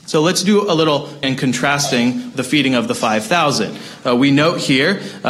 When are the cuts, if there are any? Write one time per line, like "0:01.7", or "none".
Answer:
0:01.2
0:02.3